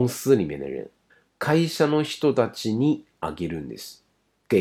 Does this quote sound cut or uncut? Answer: cut